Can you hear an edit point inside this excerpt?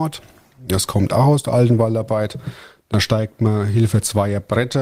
no; 0 cuts

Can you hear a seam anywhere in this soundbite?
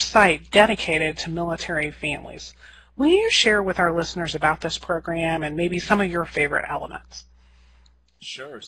no; 0 cuts

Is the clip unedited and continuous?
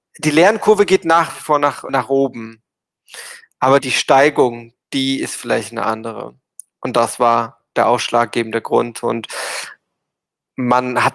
no; 3 cuts; at 1.9 s, 3.8 s, 4.8 s

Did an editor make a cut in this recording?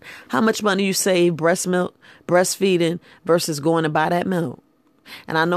no; 0 cuts

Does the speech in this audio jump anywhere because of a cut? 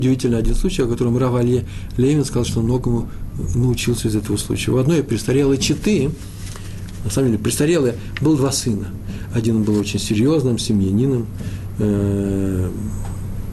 no; 0 cuts

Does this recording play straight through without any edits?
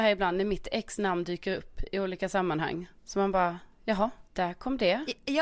no; 1 cut; at 3.0 s

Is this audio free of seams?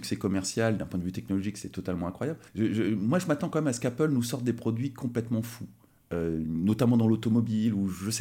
no; 1 cut; at 2.5 s

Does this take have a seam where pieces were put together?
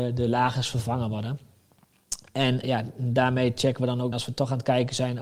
yes; 2 cuts; at 2.6 s, 4.1 s

